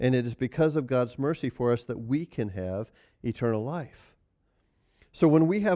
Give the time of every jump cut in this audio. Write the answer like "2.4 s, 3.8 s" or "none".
none